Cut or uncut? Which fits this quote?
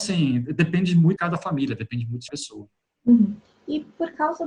cut